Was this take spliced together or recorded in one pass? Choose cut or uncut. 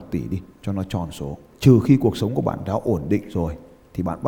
cut